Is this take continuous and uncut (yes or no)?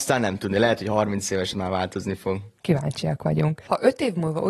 no